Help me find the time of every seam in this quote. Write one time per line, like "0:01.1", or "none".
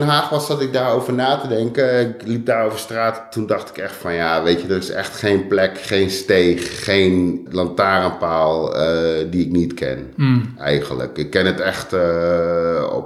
0:07.5